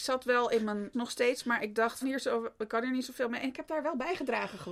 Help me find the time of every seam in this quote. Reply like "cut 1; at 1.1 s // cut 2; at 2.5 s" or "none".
cut 1; at 0.9 s // cut 2; at 2.0 s